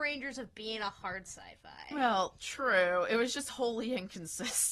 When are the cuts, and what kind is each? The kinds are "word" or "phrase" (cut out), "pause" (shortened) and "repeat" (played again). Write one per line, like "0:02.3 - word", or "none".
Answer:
none